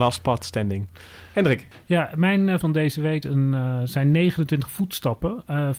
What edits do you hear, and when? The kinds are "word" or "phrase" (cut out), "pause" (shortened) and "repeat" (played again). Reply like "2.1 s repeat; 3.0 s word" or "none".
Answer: 2.6 s phrase; 3.2 s word

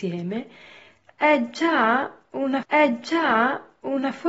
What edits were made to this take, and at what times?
2.6 s repeat

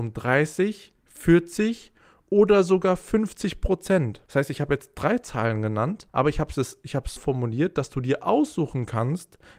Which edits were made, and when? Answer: 4.3 s pause; 6.1 s pause; 7.2 s word

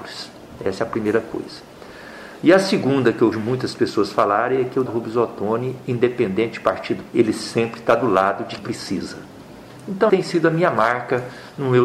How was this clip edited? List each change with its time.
3.3 s word; 4.9 s word; 7.1 s word; 8.6 s word; 10.1 s word

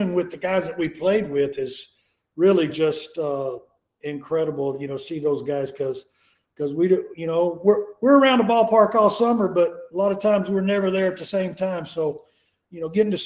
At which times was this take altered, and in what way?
none

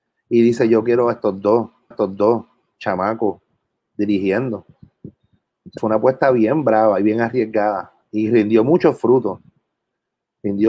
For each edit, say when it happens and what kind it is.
1.9 s repeat; 5.8 s word

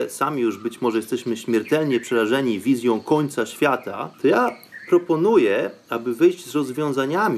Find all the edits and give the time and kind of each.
4.1 s pause

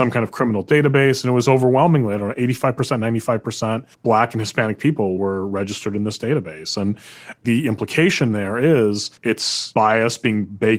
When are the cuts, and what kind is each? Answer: 3.9 s pause; 9.2 s pause

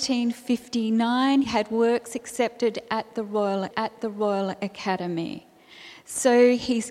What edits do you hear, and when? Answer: 1.4 s word; 3.7 s repeat

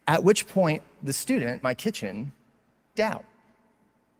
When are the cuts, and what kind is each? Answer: 1.6 s word; 2.9 s word

